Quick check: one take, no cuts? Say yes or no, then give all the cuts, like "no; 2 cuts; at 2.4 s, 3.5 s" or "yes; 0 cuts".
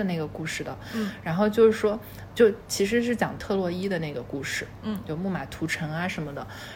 no; 1 cut; at 2.3 s